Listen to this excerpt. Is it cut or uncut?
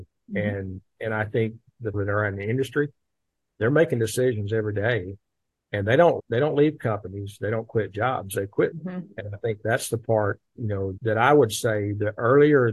cut